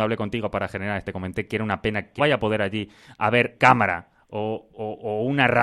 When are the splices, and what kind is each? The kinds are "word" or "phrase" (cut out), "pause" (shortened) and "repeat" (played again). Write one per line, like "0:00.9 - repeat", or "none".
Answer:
0:01.0 - word
0:02.2 - word
0:03.5 - word